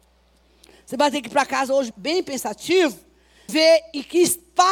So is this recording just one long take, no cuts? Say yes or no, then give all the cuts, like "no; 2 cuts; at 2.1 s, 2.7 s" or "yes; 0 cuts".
no; 2 cuts; at 1.9 s, 3.5 s